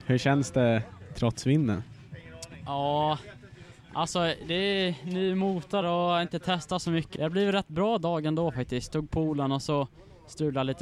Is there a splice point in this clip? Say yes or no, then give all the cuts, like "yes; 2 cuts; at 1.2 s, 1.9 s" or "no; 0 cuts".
yes; 2 cuts; at 5.8 s, 7.2 s